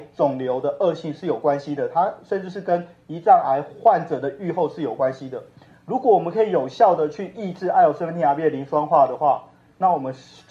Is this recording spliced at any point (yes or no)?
no